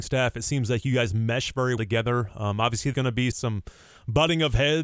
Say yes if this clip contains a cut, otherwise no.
yes